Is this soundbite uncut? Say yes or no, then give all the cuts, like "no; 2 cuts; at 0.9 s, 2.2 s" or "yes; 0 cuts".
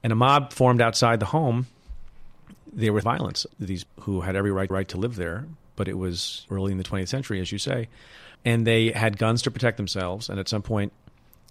no; 7 cuts; at 2.6 s, 3.0 s, 3.5 s, 3.9 s, 4.7 s, 6.5 s, 8.3 s